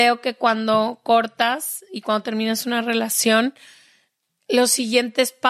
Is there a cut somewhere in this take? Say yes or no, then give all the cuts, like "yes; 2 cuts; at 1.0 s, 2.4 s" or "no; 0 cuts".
no; 0 cuts